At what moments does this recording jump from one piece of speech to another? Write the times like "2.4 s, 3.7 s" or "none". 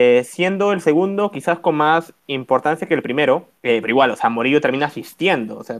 3.6 s